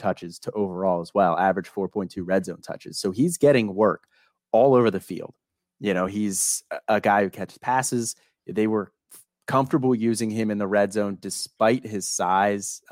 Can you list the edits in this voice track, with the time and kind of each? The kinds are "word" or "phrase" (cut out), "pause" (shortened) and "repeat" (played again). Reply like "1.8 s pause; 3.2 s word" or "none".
none